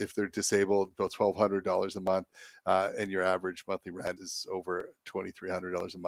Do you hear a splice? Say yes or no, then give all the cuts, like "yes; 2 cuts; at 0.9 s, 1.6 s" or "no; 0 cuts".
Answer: yes; 1 cut; at 4.2 s